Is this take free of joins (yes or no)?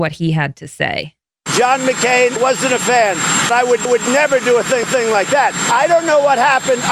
no